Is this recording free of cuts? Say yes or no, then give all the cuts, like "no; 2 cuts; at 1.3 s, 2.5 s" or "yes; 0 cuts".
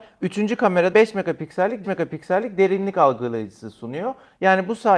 no; 2 cuts; at 0.9 s, 1.8 s